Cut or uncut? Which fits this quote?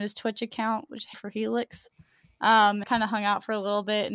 cut